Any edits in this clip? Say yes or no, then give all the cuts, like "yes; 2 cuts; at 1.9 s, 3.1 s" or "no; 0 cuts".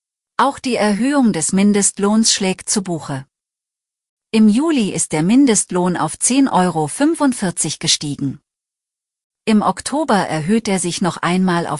no; 0 cuts